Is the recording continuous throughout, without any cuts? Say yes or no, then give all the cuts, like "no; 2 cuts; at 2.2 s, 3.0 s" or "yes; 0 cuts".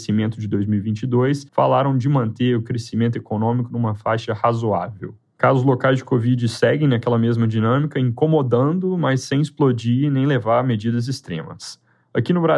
no; 1 cut; at 1.5 s